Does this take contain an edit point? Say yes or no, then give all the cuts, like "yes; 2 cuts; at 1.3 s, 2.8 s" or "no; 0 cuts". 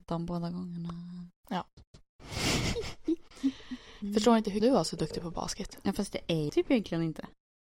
yes; 2 cuts; at 4.6 s, 6.5 s